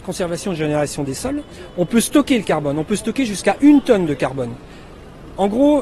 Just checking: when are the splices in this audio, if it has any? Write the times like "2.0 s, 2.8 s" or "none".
none